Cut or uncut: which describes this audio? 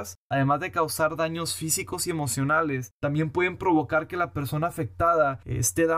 uncut